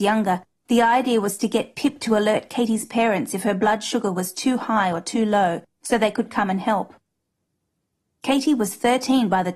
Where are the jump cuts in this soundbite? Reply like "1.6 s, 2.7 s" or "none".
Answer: none